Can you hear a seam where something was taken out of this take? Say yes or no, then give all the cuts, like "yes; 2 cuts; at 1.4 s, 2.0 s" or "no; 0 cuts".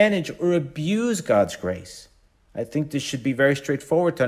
no; 0 cuts